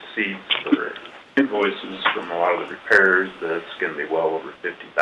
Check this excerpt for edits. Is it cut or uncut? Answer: uncut